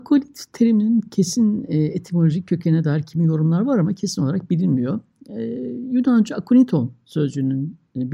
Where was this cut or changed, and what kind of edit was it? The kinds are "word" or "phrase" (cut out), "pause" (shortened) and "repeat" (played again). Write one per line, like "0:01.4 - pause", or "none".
none